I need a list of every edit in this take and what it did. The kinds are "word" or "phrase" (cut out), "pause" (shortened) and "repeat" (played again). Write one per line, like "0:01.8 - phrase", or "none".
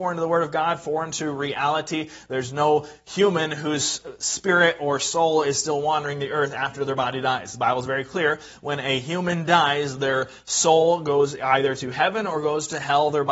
none